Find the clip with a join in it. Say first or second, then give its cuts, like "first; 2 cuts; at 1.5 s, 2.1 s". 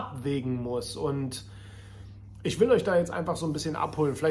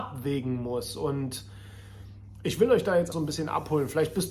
second; 1 cut; at 3.1 s